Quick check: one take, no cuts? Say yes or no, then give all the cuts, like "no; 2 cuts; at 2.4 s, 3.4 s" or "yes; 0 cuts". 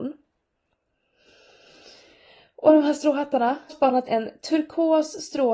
no; 2 cuts; at 3.7 s, 4.1 s